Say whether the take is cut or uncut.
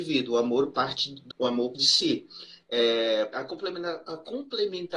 cut